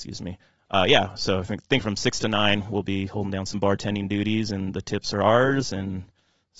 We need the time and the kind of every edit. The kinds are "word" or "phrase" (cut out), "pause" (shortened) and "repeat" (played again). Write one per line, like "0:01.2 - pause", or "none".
none